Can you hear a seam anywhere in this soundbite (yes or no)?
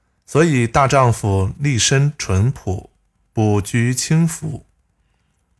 no